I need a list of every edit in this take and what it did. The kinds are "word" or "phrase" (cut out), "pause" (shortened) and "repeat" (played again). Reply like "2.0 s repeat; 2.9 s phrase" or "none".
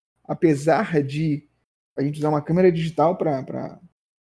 none